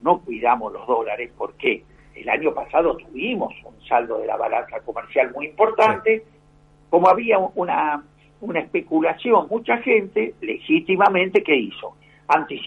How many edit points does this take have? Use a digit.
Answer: 1